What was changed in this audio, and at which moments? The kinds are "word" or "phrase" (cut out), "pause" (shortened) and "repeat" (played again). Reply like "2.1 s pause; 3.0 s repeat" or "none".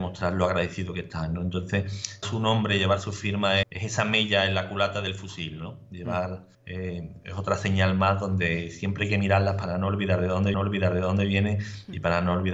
2.2 s word; 3.6 s word; 6.5 s pause; 10.5 s repeat